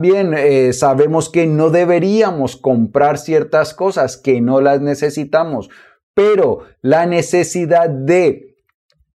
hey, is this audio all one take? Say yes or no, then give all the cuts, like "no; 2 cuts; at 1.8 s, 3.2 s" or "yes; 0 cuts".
yes; 0 cuts